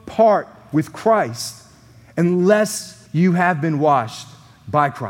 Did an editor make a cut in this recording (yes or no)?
yes